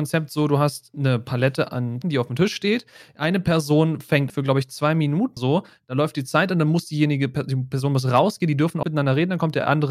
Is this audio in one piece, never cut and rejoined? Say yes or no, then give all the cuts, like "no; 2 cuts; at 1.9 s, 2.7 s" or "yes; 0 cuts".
no; 4 cuts; at 2.0 s, 4.3 s, 5.4 s, 8.8 s